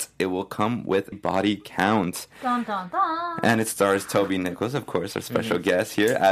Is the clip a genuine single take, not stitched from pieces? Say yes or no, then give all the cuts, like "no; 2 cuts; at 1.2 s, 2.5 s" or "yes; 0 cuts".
no; 1 cut; at 1.1 s